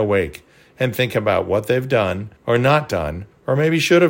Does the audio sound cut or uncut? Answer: cut